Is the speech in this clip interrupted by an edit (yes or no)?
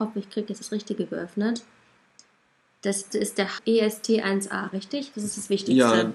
yes